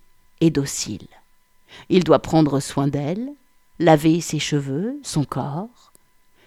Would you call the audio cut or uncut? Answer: uncut